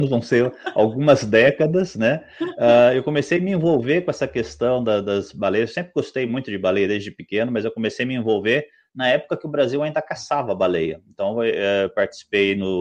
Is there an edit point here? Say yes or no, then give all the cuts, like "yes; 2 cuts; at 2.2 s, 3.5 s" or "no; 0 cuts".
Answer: no; 0 cuts